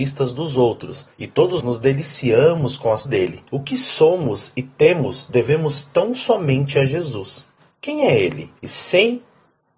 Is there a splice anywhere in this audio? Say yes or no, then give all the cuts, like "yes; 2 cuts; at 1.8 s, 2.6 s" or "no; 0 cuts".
yes; 5 cuts; at 1.1 s, 1.6 s, 3.0 s, 3.5 s, 8.6 s